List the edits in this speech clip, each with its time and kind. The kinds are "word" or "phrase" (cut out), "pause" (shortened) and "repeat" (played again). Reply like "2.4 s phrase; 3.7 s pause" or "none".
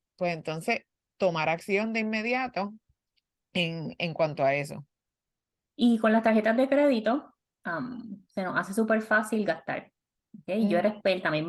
none